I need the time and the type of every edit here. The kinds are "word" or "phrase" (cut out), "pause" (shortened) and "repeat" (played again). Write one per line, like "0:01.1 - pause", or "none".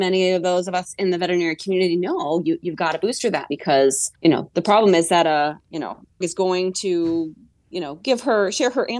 0:03.5 - word
0:04.1 - pause
0:06.2 - phrase